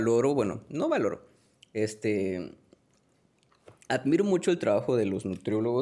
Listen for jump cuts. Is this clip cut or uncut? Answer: uncut